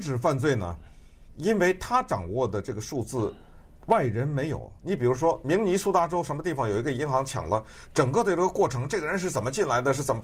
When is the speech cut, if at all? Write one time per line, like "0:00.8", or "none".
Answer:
0:04.8